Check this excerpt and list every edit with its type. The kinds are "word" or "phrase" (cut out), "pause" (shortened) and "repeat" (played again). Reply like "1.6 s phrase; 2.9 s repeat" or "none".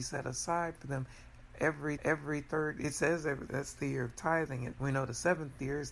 2.0 s repeat; 3.5 s phrase; 4.7 s word